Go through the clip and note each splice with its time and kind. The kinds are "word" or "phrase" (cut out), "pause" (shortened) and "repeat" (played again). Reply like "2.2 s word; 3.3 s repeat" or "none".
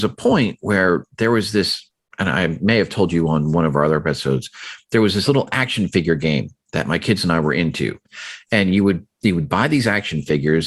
none